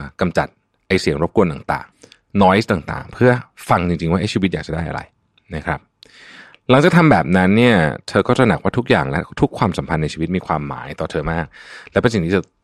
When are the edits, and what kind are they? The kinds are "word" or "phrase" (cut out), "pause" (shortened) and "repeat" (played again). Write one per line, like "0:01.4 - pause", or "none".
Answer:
0:01.9 - pause